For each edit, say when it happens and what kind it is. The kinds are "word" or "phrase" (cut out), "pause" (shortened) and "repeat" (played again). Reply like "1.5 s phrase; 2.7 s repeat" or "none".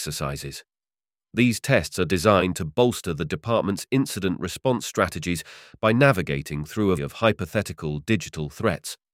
7.0 s word